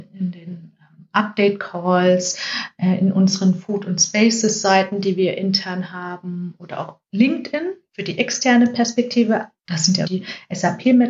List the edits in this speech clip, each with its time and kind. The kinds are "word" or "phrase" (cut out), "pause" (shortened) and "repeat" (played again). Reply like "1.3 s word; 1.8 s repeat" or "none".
10.0 s word